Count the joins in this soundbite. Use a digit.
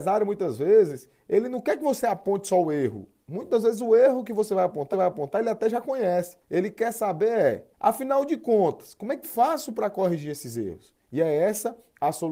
5